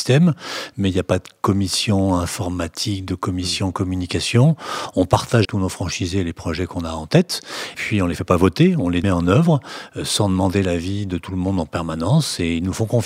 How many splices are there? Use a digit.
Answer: 3